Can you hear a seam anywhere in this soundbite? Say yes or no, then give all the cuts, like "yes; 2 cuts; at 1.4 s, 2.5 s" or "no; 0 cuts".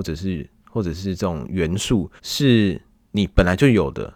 yes; 1 cut; at 2.2 s